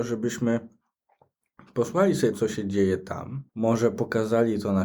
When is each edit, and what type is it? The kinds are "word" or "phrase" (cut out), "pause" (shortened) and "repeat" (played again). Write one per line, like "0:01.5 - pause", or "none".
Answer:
0:02.3 - word
0:03.5 - pause